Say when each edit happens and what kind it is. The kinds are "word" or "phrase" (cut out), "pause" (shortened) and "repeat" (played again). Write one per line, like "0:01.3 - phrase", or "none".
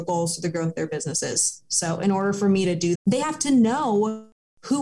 0:02.9 - word